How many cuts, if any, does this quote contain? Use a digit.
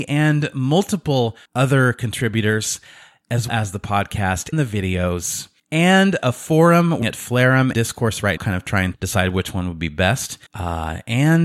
9